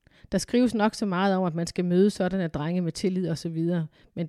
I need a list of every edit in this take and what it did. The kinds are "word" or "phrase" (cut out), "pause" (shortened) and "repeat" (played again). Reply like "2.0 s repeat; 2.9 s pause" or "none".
none